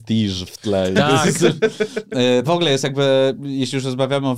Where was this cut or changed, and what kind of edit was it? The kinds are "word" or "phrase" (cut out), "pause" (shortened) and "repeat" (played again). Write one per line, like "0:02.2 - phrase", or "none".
0:02.4 - word